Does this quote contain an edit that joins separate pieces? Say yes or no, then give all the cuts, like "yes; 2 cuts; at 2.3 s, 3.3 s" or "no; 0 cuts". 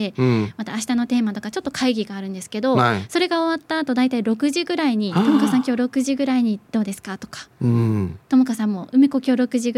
yes; 1 cut; at 6.7 s